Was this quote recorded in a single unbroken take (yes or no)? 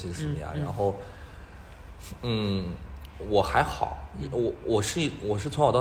yes